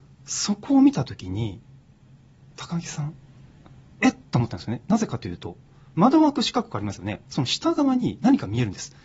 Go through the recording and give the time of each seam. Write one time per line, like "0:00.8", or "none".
none

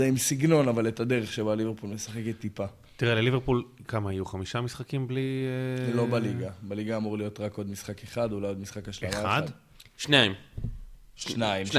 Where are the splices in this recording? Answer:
none

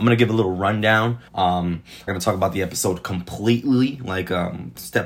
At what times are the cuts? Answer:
0:01.3
0:02.1

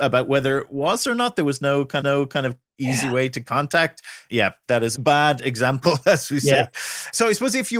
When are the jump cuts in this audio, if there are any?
0:02.0
0:04.9

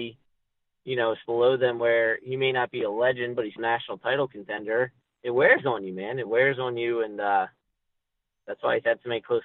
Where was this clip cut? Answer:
0:01.2
0:03.6

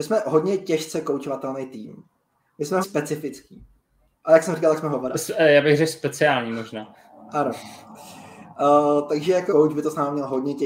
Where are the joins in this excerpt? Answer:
0:02.8
0:09.5

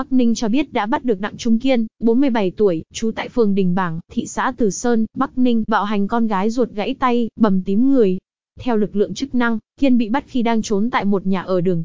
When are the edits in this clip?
0:05.7

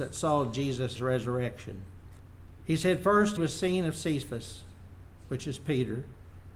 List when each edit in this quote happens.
0:01.0
0:03.4

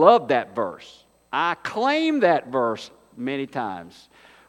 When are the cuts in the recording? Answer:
none

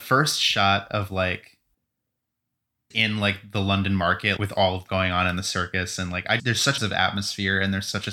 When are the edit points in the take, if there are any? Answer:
0:02.9
0:04.4
0:04.9
0:06.4
0:06.8

